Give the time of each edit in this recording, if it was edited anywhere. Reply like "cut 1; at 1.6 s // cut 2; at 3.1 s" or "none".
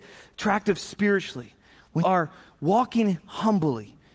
cut 1; at 2.0 s